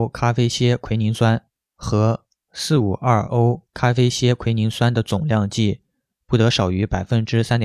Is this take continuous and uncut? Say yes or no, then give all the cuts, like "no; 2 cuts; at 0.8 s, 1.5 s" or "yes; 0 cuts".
yes; 0 cuts